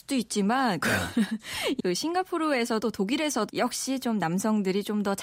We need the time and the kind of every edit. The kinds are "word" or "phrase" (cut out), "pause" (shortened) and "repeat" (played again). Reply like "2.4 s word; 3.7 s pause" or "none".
1.8 s word; 2.8 s word; 3.5 s word